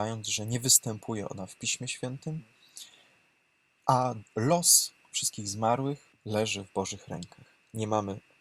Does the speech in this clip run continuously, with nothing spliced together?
no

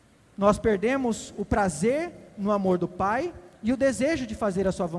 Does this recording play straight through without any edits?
yes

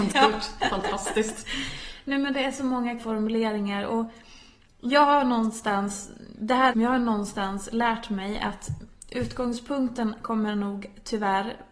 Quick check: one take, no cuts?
no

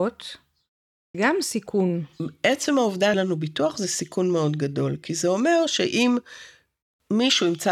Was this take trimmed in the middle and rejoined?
yes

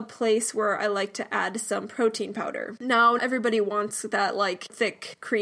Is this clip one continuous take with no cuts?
no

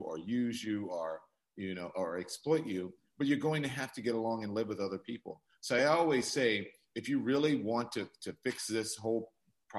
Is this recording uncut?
yes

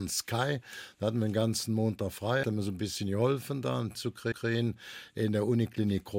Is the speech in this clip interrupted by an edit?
yes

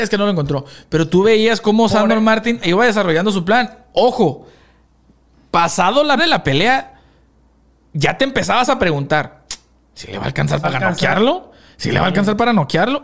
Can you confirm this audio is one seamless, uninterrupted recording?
no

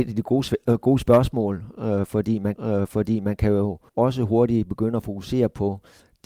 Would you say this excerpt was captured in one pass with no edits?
no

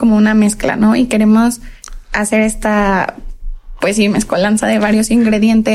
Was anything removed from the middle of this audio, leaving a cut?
no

